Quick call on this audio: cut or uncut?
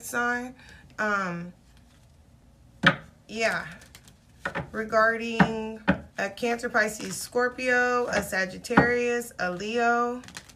cut